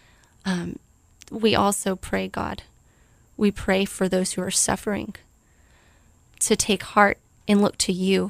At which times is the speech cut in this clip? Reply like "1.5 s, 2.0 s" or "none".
none